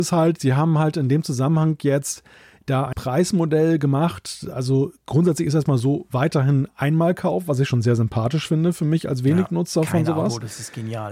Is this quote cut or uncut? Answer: cut